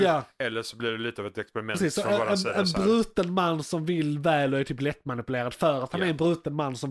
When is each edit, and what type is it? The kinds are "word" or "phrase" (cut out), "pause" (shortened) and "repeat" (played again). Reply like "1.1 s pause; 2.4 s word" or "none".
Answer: none